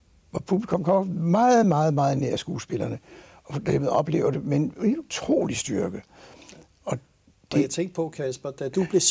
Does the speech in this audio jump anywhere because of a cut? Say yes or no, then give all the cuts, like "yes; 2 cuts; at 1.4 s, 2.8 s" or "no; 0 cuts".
no; 0 cuts